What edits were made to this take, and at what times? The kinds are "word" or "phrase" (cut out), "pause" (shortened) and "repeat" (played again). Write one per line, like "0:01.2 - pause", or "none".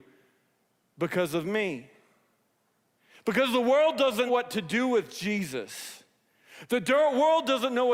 0:04.3 - word